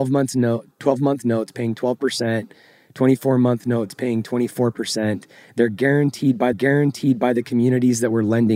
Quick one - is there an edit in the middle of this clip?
yes; 1 cut; at 6.5 s

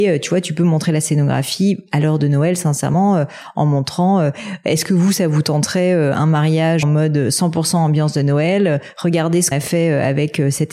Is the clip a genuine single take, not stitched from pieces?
no; 2 cuts; at 6.8 s, 9.5 s

